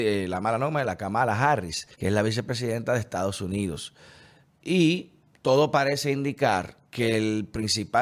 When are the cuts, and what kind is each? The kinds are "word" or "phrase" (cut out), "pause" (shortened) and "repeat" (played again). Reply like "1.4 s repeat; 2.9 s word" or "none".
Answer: 1.9 s pause; 5.3 s pause; 6.9 s pause